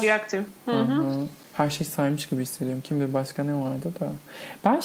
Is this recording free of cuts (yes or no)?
yes